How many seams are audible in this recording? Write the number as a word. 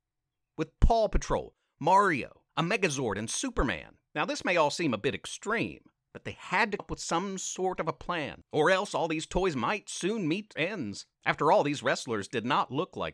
six